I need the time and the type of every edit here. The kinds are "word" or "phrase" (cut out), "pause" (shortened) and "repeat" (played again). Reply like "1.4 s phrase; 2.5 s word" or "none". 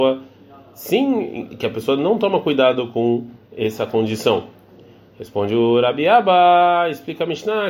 none